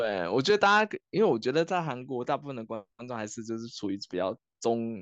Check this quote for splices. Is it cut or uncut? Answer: uncut